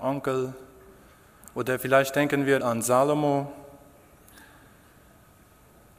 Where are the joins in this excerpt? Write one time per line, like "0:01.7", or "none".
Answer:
0:02.6